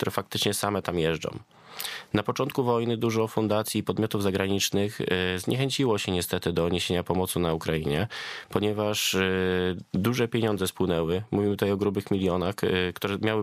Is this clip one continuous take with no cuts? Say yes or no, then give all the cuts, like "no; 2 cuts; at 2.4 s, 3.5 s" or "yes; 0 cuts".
yes; 0 cuts